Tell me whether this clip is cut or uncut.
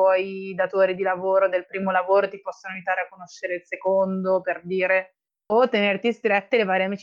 uncut